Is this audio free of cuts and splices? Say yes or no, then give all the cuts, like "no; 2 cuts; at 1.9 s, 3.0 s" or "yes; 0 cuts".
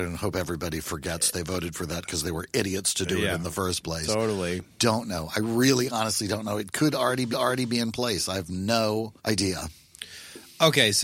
no; 2 cuts; at 7.3 s, 9.2 s